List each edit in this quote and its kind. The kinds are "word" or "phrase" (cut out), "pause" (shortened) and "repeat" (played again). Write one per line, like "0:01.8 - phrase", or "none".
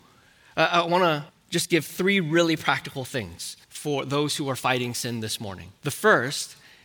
0:01.3 - pause
0:03.6 - pause
0:05.8 - pause